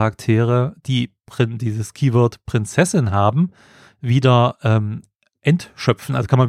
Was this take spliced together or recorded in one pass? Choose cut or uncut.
uncut